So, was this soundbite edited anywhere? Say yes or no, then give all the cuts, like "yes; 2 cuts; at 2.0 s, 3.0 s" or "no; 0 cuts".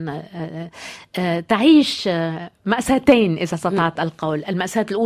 no; 0 cuts